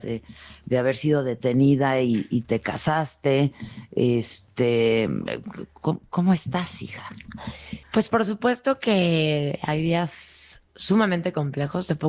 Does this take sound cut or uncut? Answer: cut